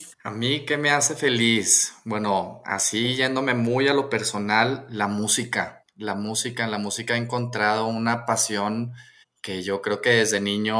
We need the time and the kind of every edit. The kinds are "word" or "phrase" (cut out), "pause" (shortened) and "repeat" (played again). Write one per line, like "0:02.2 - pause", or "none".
none